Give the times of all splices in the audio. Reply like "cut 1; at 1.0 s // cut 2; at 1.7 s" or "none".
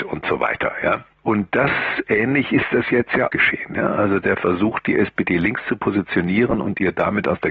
cut 1; at 3.3 s